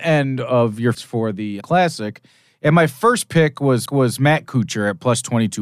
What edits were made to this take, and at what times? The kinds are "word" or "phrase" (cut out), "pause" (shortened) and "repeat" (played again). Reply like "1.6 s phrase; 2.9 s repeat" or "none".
0.9 s word; 1.6 s word; 3.9 s repeat